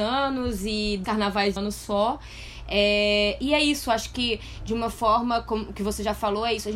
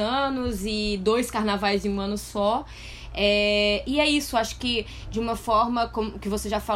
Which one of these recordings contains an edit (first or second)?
first